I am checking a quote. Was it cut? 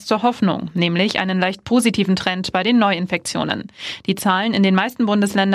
no; 0 cuts

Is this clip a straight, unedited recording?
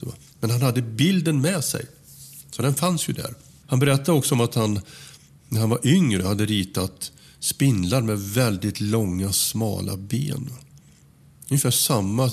yes; 0 cuts

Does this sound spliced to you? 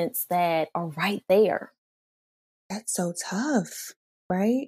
no; 0 cuts

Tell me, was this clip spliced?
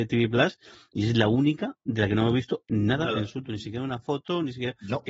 no; 0 cuts

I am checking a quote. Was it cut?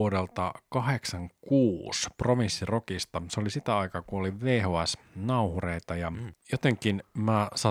no; 0 cuts

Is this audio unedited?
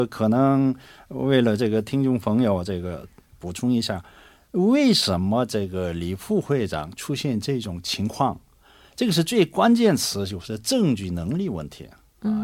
yes; 0 cuts

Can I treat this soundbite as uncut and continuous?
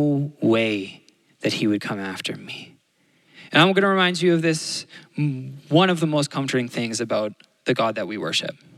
yes; 0 cuts

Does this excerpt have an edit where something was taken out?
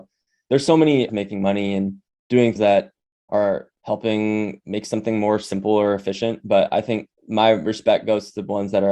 yes; 4 cuts; at 1.1 s, 2.6 s, 3.8 s, 7.2 s

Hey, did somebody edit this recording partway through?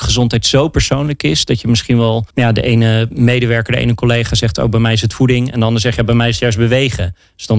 yes; 1 cut; at 2.3 s

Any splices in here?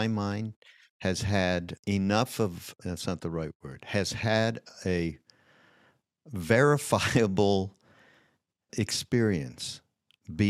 yes; 3 cuts; at 1.8 s, 2.8 s, 8.7 s

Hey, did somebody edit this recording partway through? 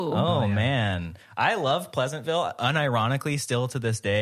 no; 0 cuts

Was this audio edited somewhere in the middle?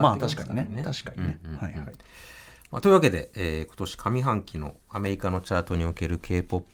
no; 0 cuts

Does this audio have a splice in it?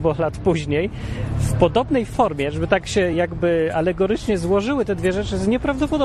no; 0 cuts

